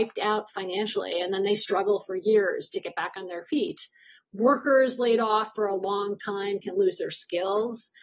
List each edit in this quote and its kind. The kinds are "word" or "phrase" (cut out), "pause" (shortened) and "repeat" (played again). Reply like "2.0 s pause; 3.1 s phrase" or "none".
none